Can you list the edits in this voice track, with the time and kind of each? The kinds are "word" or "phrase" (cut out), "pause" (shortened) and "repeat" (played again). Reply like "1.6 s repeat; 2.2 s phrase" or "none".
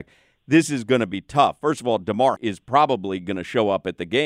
2.4 s word